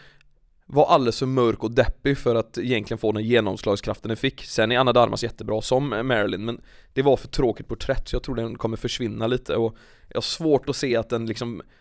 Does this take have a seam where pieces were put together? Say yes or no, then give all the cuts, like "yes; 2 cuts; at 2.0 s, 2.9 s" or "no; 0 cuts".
no; 0 cuts